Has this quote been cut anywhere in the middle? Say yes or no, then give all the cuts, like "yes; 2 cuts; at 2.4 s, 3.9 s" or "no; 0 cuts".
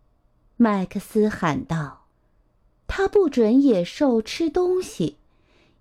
yes; 1 cut; at 2.1 s